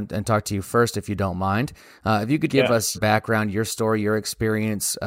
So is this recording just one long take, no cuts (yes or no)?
no